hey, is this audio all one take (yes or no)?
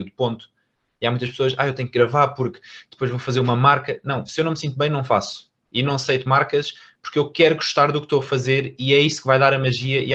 yes